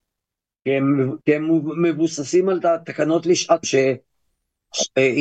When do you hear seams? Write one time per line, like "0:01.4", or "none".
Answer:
0:01.2
0:03.6

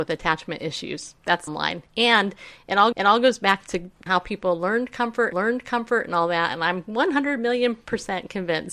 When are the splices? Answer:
0:01.5
0:02.9
0:04.1
0:05.3

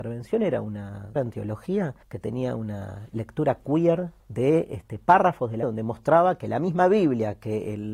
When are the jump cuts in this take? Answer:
0:01.2
0:02.0
0:04.2
0:05.6

